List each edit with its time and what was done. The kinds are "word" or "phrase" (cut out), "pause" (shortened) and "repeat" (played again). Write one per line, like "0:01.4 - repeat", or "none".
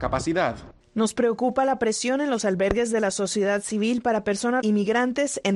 0:04.6 - word